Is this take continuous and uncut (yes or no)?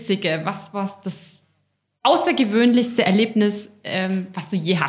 yes